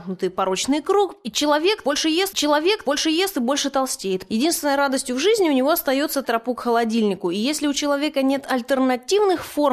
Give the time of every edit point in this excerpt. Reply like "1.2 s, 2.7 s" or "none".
2.3 s, 6.2 s